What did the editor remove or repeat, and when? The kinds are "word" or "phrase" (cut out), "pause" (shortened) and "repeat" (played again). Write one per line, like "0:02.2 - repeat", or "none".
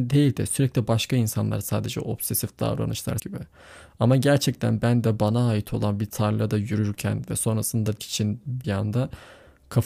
0:03.2 - word
0:08.0 - word
0:08.6 - phrase